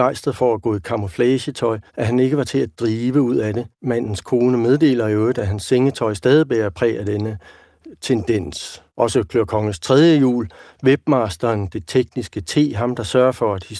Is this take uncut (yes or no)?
no